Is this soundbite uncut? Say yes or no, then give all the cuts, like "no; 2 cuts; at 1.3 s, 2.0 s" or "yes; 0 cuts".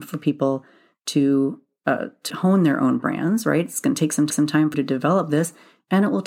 no; 3 cuts; at 2.3 s, 4.3 s, 4.7 s